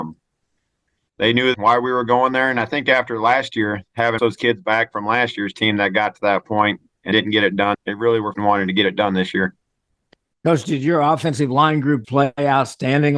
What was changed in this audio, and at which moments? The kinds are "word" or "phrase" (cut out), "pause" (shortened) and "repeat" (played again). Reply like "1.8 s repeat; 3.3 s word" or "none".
1.5 s word; 4.2 s word; 7.1 s word; 7.7 s word; 8.3 s word; 12.0 s word

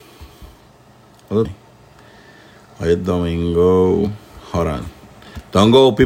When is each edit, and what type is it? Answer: 1.4 s word

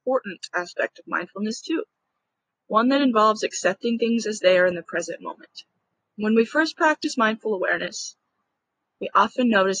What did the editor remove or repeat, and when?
none

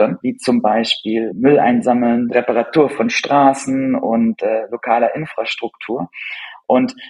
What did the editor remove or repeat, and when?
none

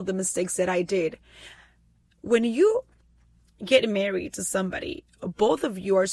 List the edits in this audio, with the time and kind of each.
none

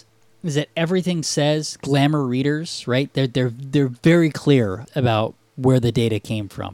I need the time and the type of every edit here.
4.9 s word

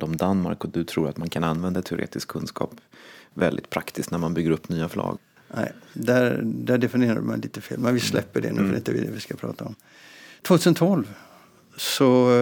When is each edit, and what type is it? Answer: none

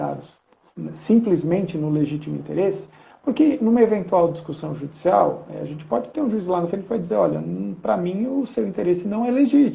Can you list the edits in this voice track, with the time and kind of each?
none

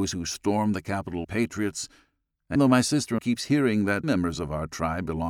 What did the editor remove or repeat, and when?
1.2 s word; 2.6 s word; 3.2 s word; 4.0 s word

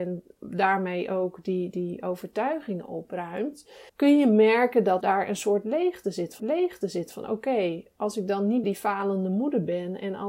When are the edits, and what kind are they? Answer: 3.9 s pause; 5.0 s word; 6.4 s repeat; 8.6 s word

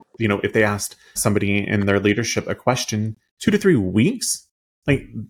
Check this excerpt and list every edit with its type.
1.2 s word

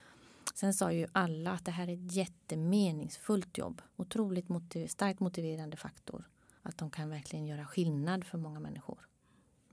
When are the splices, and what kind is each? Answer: 3.9 s pause; 6.6 s pause

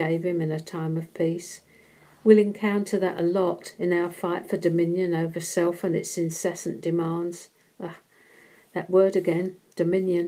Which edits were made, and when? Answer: none

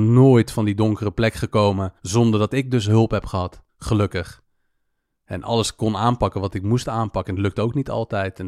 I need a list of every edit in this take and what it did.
2.0 s pause; 3.7 s pause

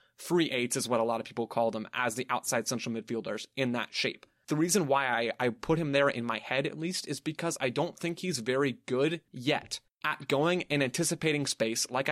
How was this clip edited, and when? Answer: 9.3 s pause

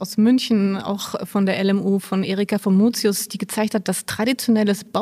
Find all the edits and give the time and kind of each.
none

